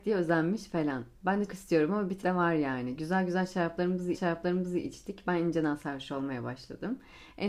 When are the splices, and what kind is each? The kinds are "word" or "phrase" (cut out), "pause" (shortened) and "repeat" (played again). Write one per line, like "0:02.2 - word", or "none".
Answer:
0:01.5 - word
0:02.2 - word
0:04.1 - repeat